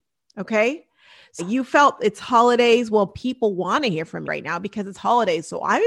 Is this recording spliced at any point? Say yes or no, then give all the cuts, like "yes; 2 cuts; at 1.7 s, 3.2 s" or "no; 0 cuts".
yes; 2 cuts; at 1.4 s, 4.2 s